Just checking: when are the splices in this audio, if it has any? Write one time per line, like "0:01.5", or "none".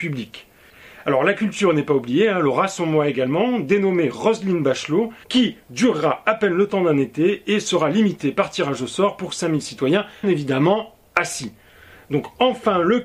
0:05.2
0:10.2